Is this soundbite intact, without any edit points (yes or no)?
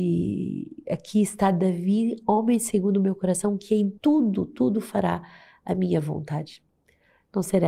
no